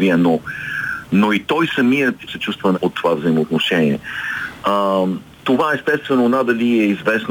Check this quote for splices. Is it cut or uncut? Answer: cut